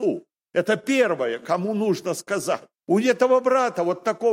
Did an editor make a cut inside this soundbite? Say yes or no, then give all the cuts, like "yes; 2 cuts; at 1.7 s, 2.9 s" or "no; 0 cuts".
yes; 1 cut; at 2.8 s